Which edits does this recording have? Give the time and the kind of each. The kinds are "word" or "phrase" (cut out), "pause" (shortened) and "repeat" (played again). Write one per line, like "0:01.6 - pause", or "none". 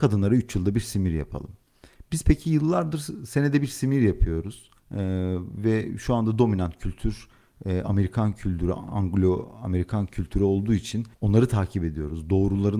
0:04.8 - pause
0:11.1 - pause